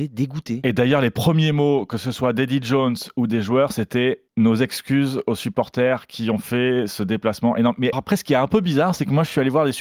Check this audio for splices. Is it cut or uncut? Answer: cut